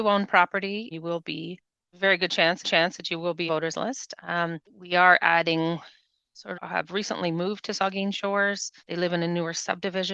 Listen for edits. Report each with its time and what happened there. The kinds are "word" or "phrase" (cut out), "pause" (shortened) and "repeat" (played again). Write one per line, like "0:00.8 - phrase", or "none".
0:00.9 - word
0:01.9 - word
0:02.6 - repeat
0:03.5 - phrase
0:04.6 - pause
0:06.5 - phrase
0:08.8 - pause